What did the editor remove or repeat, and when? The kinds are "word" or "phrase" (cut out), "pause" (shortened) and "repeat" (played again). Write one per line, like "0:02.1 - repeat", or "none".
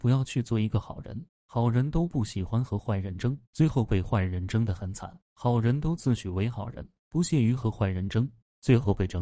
0:03.4 - pause
0:05.2 - pause